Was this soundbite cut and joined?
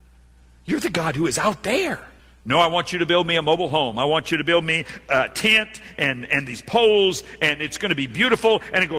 yes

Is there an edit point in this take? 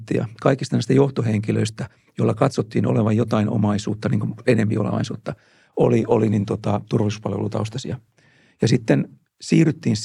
no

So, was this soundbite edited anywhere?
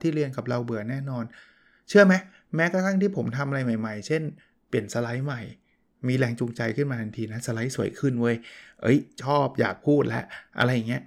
no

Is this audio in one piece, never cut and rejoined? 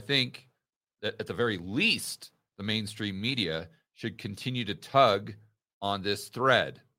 yes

